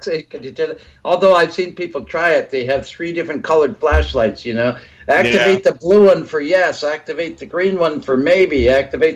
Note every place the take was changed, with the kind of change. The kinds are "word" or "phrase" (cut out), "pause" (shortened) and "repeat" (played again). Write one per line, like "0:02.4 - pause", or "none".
none